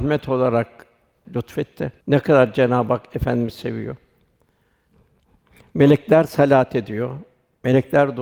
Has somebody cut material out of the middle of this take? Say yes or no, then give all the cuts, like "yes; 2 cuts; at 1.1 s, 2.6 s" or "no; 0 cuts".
yes; 2 cuts; at 1.2 s, 2.0 s